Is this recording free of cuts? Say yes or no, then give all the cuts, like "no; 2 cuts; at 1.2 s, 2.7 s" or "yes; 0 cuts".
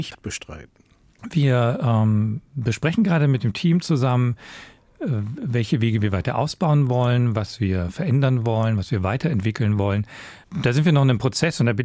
yes; 0 cuts